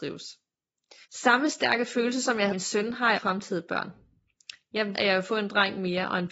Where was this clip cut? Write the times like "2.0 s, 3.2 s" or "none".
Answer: 1.0 s, 2.5 s, 3.1 s, 4.9 s